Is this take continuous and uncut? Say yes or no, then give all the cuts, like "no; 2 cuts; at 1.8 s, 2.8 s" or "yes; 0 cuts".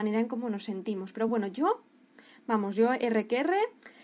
yes; 0 cuts